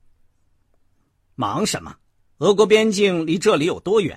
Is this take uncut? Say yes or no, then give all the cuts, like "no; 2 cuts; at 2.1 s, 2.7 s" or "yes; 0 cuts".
no; 1 cut; at 2.0 s